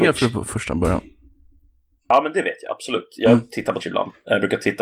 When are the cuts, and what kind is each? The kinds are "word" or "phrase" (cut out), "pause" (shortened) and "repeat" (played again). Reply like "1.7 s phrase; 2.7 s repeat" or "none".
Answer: 3.8 s word